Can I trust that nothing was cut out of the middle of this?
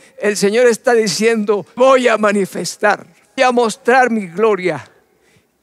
no; 2 cuts; at 1.8 s, 3.4 s

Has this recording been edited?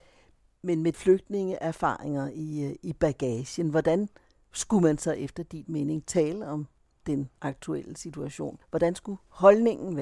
yes; 3 cuts; at 0.9 s, 7.4 s, 8.6 s

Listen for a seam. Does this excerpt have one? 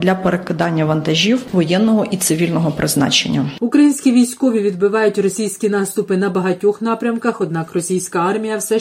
no; 0 cuts

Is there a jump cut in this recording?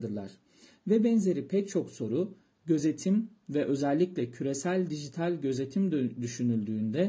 no; 0 cuts

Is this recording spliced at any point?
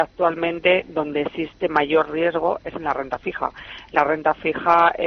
no; 0 cuts

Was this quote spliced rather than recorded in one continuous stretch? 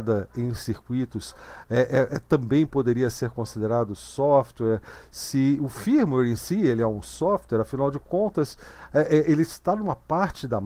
no; 0 cuts

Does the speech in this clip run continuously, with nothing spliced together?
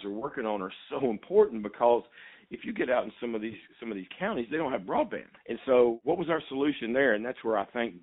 no; 1 cut; at 5.4 s

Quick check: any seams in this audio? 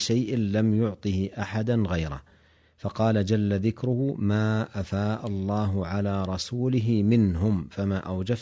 no; 0 cuts

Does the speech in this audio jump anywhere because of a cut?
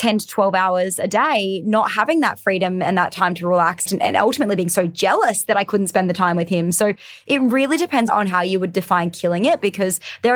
yes; 1 cut; at 3.9 s

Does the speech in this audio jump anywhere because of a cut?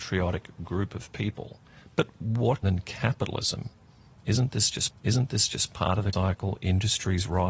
yes; 4 cuts; at 1.7 s, 2.6 s, 4.9 s, 6.1 s

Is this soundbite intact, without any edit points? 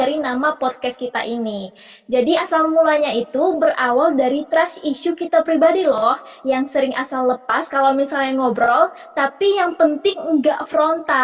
yes; 0 cuts

